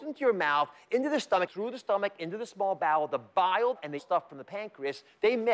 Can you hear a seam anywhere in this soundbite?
no; 0 cuts

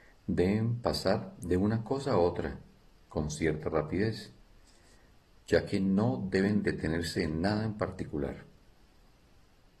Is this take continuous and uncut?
yes; 0 cuts

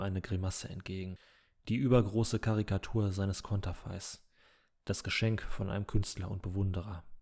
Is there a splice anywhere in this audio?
no; 0 cuts

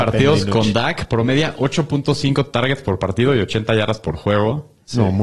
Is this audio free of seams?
yes; 0 cuts

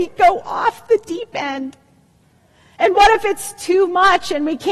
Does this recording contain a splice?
no; 0 cuts

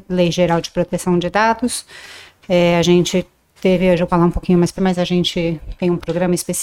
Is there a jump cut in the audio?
yes; 2 cuts; at 4.1 s, 4.8 s

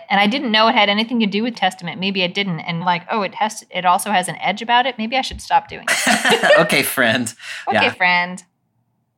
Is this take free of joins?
no; 2 cuts; at 1.5 s, 2.8 s

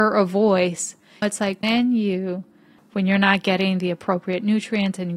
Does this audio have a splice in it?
no; 0 cuts

